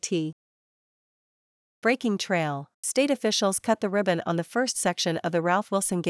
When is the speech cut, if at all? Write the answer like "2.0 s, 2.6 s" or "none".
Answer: 2.7 s